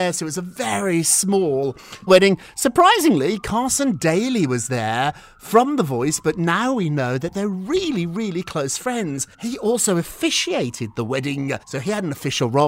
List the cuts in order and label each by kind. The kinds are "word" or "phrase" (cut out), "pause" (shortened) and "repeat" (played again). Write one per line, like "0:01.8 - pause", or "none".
0:02.1 - word
0:09.3 - pause
0:11.6 - pause